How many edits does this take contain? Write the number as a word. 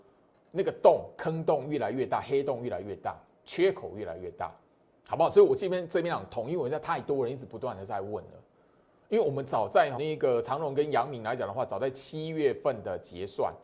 one